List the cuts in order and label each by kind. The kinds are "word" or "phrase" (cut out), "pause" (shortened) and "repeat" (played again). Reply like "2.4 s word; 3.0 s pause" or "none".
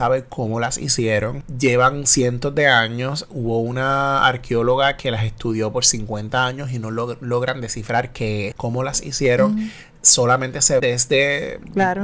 8.5 s word; 10.8 s word